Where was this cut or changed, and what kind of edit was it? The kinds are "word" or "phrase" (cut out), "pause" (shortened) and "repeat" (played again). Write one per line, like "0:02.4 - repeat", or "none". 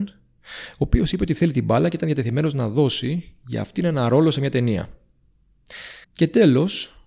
0:06.0 - pause